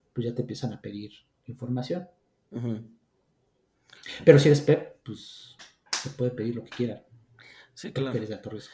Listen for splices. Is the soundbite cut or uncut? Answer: uncut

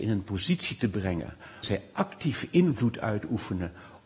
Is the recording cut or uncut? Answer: cut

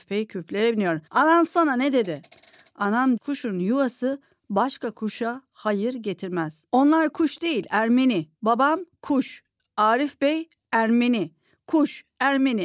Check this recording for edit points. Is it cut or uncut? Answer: cut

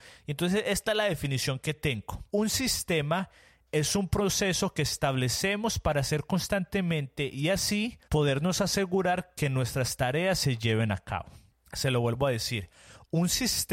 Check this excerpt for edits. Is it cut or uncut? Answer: cut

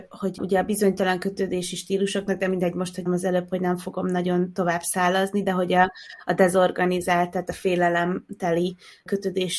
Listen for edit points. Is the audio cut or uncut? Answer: cut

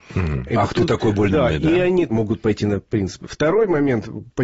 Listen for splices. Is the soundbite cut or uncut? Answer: cut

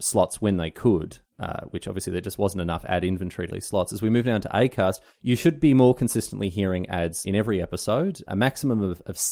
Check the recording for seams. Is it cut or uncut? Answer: cut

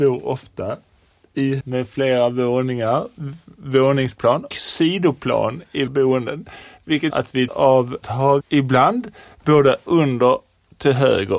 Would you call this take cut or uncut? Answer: cut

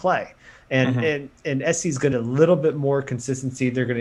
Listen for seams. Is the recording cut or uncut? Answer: cut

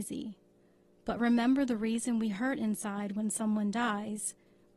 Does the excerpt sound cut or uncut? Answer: uncut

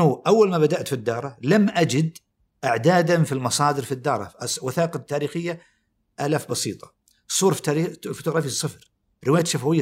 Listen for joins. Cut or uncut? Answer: uncut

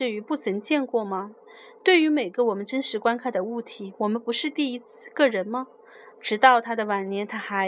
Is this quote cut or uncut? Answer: uncut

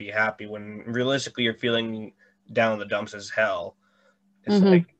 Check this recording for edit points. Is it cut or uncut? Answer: uncut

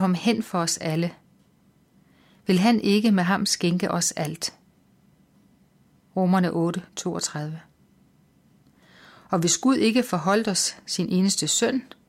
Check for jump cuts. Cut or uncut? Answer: uncut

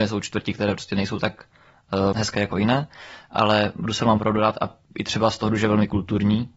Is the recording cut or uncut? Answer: cut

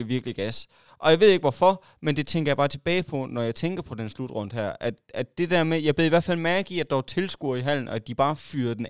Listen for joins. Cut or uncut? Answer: uncut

